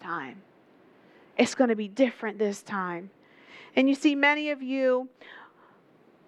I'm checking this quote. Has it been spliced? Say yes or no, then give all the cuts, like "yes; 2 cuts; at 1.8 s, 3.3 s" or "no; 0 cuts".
no; 0 cuts